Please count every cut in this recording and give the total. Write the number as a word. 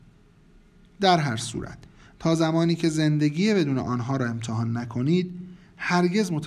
zero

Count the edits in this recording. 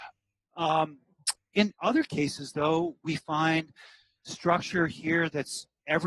zero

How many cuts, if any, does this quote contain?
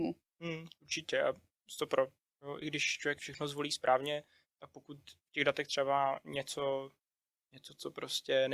one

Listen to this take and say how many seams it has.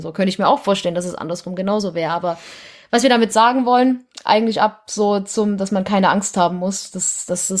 zero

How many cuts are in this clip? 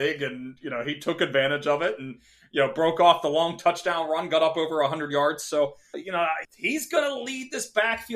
two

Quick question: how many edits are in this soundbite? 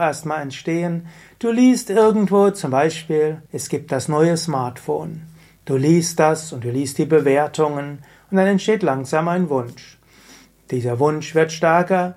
one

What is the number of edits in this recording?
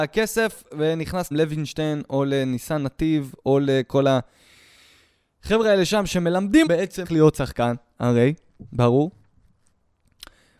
three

